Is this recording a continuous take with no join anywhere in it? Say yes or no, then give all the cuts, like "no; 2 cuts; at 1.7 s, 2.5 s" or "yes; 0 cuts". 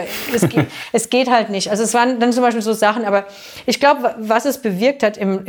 yes; 0 cuts